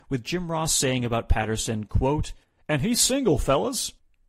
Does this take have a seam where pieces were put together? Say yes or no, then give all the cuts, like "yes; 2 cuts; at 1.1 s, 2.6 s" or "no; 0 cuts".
no; 0 cuts